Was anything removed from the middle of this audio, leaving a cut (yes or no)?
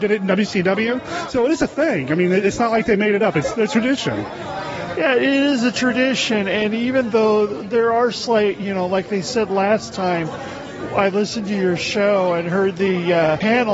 no